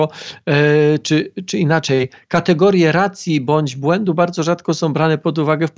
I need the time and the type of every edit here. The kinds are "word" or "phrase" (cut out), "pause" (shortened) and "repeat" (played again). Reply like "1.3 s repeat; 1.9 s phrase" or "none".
none